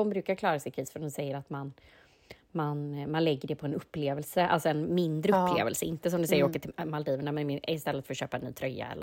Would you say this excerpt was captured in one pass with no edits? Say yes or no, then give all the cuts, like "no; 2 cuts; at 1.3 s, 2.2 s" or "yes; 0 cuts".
yes; 0 cuts